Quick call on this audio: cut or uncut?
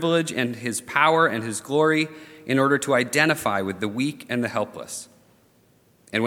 uncut